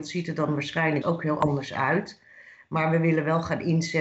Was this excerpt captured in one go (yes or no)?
no